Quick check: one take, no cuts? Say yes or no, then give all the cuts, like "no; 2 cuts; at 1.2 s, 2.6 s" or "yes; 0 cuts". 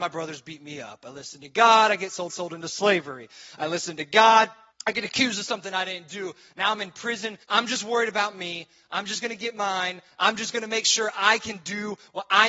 no; 3 cuts; at 2.3 s, 4.7 s, 7.4 s